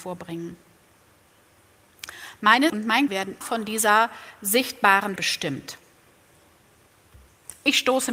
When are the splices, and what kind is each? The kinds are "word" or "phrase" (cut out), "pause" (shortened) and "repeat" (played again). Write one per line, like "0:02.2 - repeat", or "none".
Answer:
0:02.7 - word
0:03.1 - word
0:03.4 - word
0:05.2 - word